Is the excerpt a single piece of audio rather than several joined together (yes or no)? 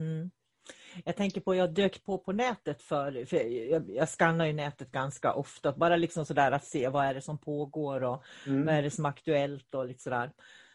yes